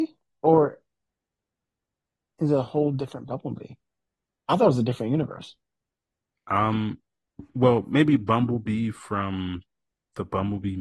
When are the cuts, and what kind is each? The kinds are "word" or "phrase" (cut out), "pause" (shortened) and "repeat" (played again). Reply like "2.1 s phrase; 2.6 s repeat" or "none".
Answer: 7.5 s pause